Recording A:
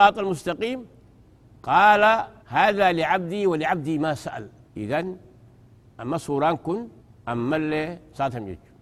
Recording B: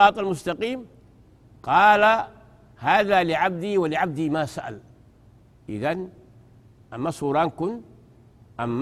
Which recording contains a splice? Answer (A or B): A